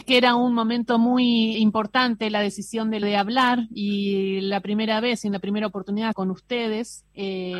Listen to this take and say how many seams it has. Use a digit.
3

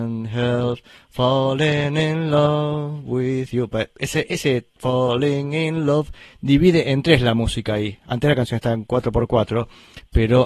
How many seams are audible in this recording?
0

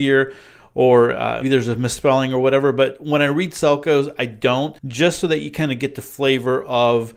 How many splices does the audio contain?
2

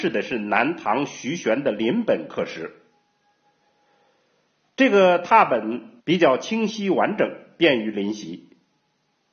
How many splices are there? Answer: 1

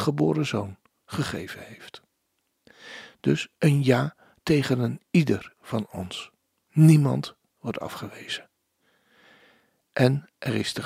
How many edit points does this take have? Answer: 0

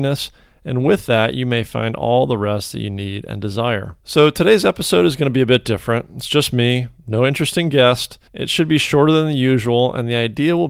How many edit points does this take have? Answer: 1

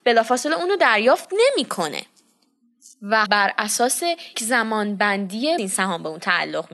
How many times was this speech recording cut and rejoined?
3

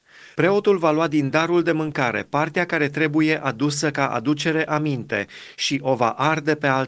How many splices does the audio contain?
0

